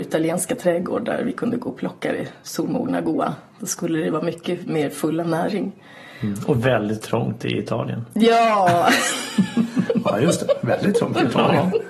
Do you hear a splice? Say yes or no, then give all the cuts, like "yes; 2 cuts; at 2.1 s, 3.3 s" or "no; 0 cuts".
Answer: no; 0 cuts